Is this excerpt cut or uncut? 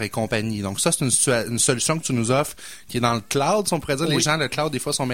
uncut